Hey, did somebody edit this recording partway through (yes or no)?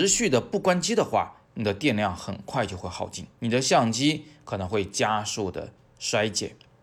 yes